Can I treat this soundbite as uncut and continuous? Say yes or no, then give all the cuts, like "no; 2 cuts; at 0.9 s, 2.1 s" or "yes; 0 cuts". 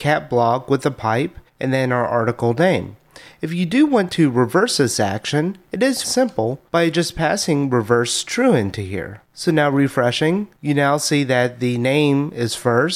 no; 3 cuts; at 1.5 s, 6.0 s, 9.2 s